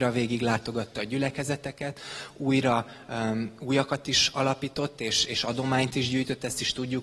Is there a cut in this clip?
no; 0 cuts

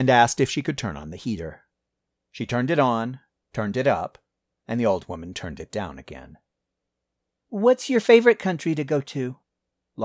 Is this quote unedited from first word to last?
yes; 0 cuts

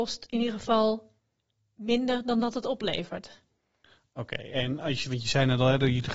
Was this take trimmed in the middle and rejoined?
no; 0 cuts

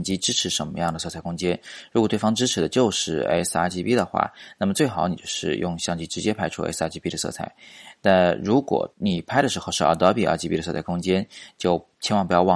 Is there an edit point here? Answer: yes; 1 cut; at 8.9 s

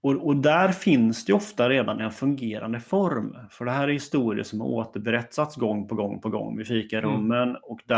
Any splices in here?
no; 0 cuts

